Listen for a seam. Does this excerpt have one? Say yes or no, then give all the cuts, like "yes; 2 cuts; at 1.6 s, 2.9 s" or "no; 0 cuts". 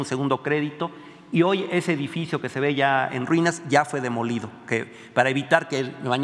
no; 0 cuts